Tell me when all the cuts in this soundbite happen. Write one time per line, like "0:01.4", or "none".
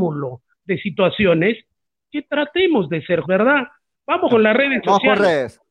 0:03.2
0:04.3